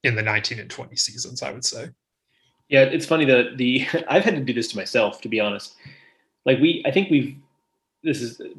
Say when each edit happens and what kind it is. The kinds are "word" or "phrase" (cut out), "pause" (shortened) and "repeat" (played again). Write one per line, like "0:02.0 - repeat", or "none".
none